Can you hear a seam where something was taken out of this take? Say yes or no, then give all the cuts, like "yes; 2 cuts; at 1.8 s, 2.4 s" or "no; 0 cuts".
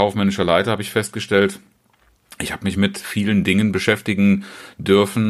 no; 0 cuts